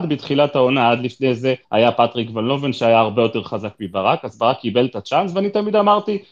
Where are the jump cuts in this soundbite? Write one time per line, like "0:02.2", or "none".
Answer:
0:01.6